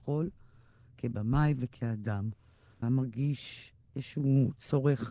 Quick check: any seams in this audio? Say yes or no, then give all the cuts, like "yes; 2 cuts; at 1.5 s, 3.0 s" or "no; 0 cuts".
yes; 1 cut; at 2.8 s